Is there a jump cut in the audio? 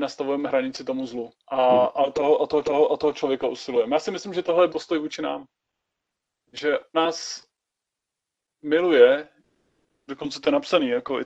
yes; 5 cuts; at 1.4 s, 2.6 s, 4.7 s, 6.9 s, 10.1 s

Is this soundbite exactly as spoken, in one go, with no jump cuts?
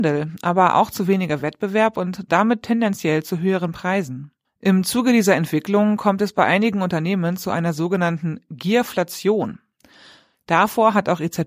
yes; 0 cuts

